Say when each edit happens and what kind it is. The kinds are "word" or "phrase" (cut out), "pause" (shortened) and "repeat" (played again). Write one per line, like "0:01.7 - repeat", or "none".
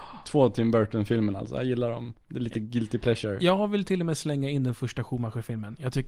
0:02.2 - pause